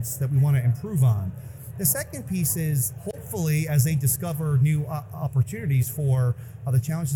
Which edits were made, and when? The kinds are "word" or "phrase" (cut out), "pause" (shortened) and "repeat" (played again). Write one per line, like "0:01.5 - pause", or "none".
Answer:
none